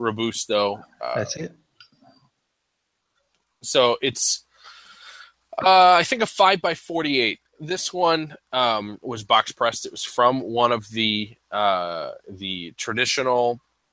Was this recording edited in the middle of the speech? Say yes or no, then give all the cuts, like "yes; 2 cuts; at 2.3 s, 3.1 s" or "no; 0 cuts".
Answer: no; 0 cuts